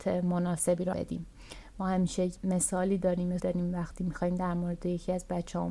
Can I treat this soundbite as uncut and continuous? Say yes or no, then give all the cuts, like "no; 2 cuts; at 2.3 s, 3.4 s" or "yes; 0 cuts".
no; 3 cuts; at 0.9 s, 2.3 s, 3.4 s